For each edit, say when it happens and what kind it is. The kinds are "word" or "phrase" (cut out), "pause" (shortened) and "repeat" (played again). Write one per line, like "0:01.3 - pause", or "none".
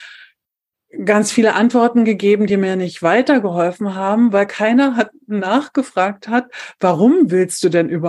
none